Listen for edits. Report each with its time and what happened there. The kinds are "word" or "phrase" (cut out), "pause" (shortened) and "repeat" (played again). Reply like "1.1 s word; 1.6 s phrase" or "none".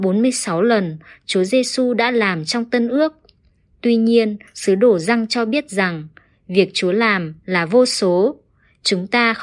none